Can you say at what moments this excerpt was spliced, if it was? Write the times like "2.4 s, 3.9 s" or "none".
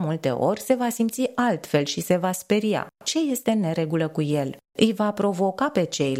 none